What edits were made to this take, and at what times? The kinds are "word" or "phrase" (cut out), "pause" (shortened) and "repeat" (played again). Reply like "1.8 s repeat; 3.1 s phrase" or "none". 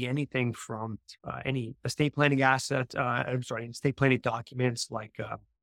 1.2 s pause